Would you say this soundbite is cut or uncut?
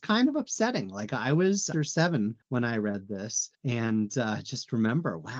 cut